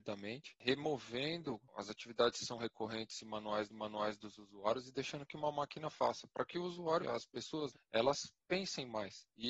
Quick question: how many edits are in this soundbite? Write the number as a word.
three